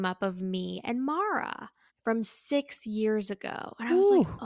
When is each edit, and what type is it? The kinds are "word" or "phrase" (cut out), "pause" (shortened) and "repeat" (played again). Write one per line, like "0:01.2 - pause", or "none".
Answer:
0:01.9 - pause